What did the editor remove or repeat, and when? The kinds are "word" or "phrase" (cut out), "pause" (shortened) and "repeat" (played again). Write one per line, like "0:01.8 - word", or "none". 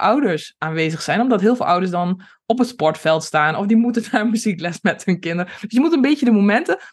none